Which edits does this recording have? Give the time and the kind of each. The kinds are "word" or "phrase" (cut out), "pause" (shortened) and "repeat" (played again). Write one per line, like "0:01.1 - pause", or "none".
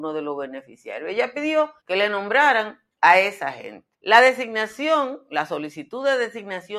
0:01.8 - pause
0:02.9 - pause
0:03.9 - pause